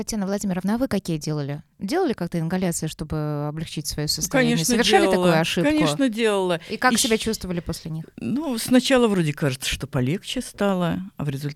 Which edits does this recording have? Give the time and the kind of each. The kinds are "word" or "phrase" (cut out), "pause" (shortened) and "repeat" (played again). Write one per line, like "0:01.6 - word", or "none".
0:01.7 - pause